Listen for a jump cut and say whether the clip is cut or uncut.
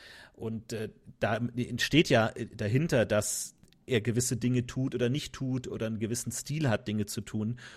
uncut